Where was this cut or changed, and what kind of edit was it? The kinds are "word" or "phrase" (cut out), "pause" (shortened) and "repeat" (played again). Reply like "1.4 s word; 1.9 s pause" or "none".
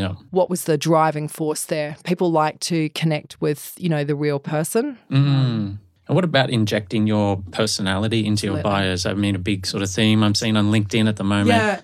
none